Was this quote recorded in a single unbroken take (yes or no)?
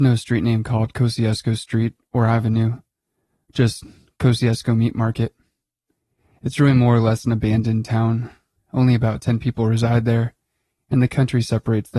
yes